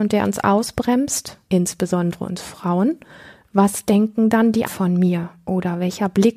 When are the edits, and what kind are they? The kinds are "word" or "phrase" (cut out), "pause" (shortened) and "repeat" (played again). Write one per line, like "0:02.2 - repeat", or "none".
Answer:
0:01.5 - pause
0:04.7 - word